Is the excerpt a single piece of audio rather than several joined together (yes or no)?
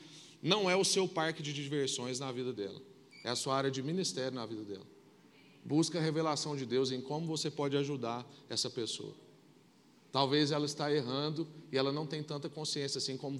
yes